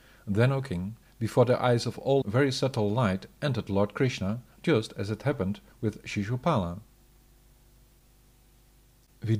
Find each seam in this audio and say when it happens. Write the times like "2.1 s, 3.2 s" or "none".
1.0 s, 2.2 s, 4.5 s

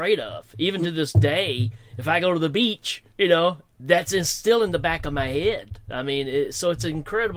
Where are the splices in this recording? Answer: 3.1 s

